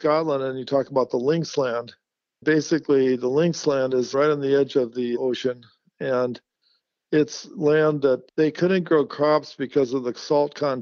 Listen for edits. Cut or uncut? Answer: cut